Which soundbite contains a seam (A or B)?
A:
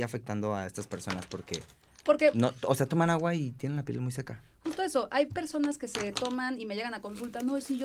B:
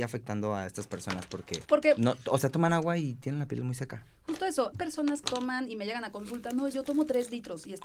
B